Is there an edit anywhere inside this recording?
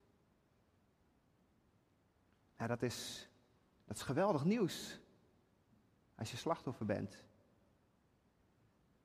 no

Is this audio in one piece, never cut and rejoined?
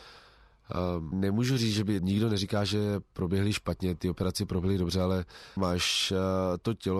no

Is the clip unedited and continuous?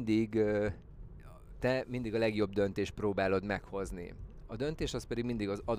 yes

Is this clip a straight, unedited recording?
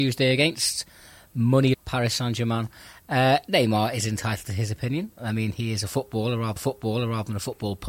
no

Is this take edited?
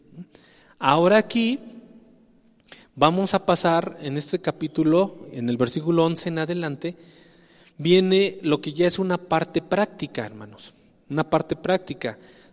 no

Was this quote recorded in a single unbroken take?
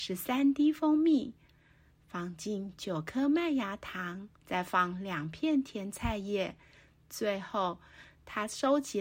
no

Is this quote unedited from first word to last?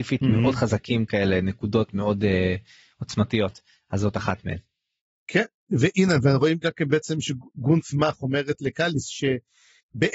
yes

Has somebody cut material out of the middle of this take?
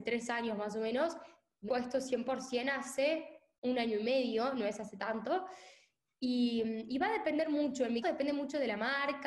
yes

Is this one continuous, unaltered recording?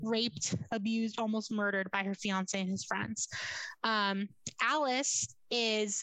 yes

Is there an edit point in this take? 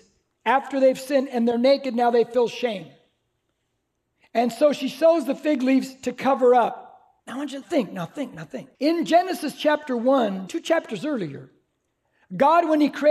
yes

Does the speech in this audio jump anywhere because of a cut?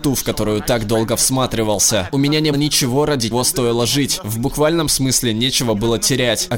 yes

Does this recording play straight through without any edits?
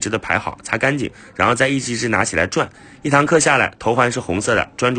yes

